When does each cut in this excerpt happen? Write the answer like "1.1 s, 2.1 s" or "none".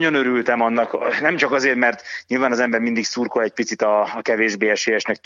none

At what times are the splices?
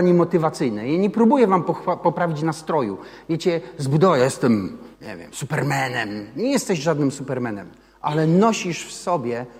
4.9 s

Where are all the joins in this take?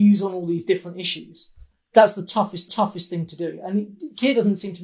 2.7 s

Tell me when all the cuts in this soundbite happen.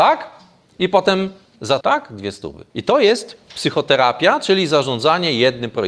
1.8 s, 2.7 s

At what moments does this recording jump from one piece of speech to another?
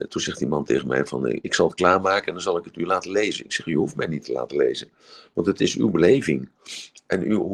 none

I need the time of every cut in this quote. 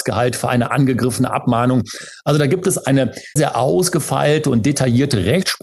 3.4 s

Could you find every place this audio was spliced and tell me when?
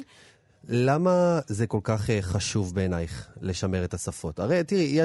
none

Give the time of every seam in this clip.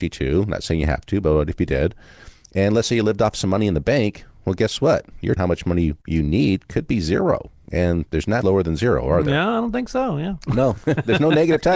5.4 s, 6.0 s, 8.4 s

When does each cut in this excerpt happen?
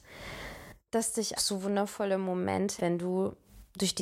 1.4 s, 2.8 s

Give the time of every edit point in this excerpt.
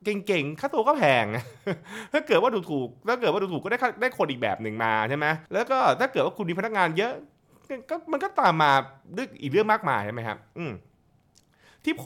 5.5 s

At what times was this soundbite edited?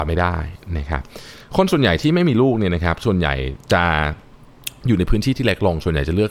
3.6 s

